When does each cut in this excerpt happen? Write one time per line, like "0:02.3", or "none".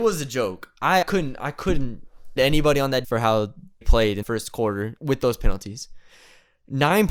0:01.0
0:02.4
0:03.0
0:03.8
0:04.2
0:05.0